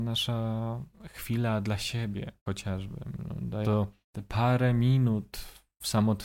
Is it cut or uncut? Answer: cut